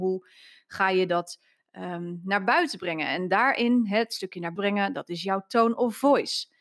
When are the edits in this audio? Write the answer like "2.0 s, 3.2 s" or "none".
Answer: 4.6 s